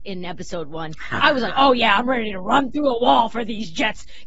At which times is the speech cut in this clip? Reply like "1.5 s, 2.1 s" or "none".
none